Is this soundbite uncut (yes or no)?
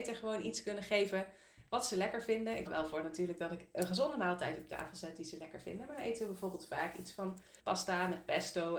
no